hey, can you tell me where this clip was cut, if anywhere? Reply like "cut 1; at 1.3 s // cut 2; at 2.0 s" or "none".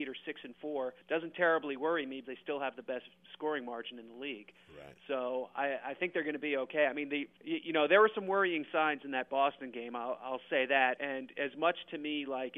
cut 1; at 1.0 s // cut 2; at 2.2 s // cut 3; at 7.4 s // cut 4; at 11.0 s

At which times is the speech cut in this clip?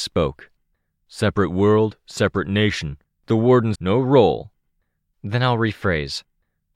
cut 1; at 3.1 s // cut 2; at 3.7 s

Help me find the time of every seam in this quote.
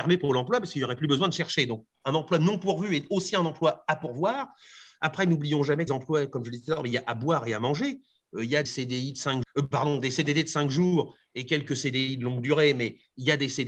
cut 1; at 5.9 s // cut 2; at 8.7 s // cut 3; at 9.4 s

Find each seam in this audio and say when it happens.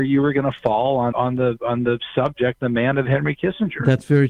cut 1; at 1.1 s

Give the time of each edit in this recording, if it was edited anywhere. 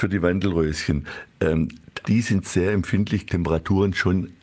cut 1; at 2.0 s // cut 2; at 3.3 s

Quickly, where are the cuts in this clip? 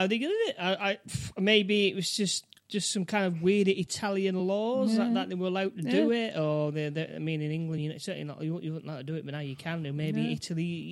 none

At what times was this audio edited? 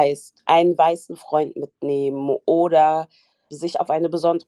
none

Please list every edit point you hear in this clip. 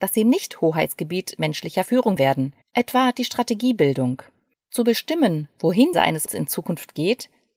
cut 1; at 2.2 s // cut 2; at 2.6 s // cut 3; at 5.9 s // cut 4; at 6.3 s

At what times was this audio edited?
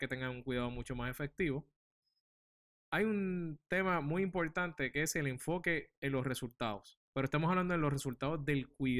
cut 1; at 7.1 s

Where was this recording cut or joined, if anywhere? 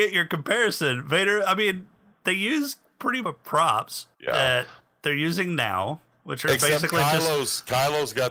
cut 1; at 3.2 s // cut 2; at 4.1 s

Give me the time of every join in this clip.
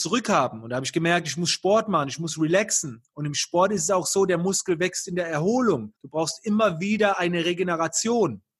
cut 1; at 6.0 s

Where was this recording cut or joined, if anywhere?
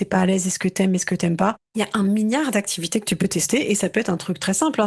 cut 1; at 1.6 s

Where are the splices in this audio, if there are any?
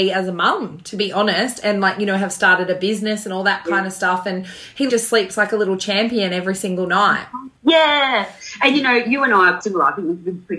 cut 1; at 4.9 s // cut 2; at 7.6 s // cut 3; at 9.6 s

